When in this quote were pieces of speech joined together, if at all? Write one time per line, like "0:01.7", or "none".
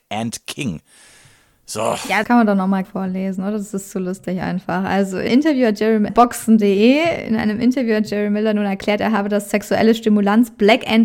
0:02.2
0:02.8
0:05.3
0:06.1